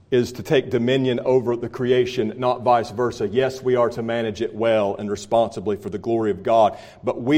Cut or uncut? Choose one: uncut